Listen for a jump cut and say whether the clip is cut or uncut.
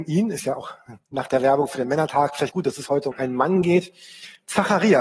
cut